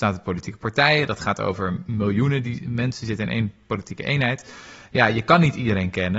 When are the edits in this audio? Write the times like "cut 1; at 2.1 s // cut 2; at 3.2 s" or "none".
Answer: none

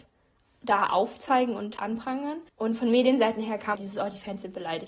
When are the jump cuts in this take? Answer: cut 1; at 1.8 s // cut 2; at 2.5 s // cut 3; at 3.7 s

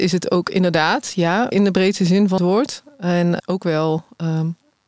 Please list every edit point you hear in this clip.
cut 1; at 1.5 s // cut 2; at 2.4 s // cut 3; at 3.4 s

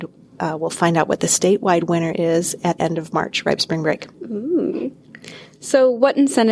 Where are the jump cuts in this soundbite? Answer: cut 1; at 2.8 s // cut 2; at 3.6 s // cut 3; at 4.1 s

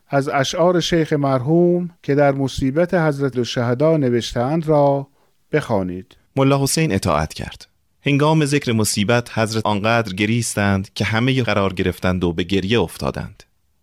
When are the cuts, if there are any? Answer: cut 1; at 2.0 s // cut 2; at 3.3 s // cut 3; at 6.2 s // cut 4; at 7.9 s // cut 5; at 9.6 s // cut 6; at 11.4 s

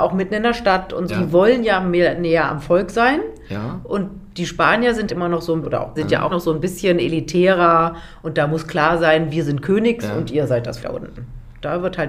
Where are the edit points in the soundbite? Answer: cut 1; at 1.1 s // cut 2; at 5.1 s // cut 3; at 5.6 s // cut 4; at 6.0 s // cut 5; at 6.3 s // cut 6; at 10.8 s

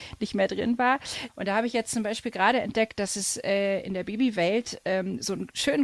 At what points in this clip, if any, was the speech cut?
none

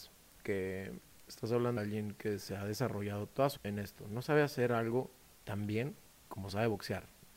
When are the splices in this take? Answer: cut 1; at 1.8 s // cut 2; at 3.6 s

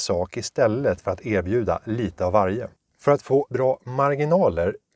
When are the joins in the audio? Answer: cut 1; at 3.5 s

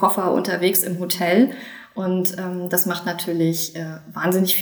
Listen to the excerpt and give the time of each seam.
none

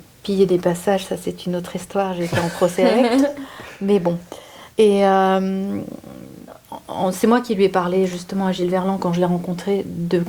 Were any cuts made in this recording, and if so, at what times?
cut 1; at 4.7 s

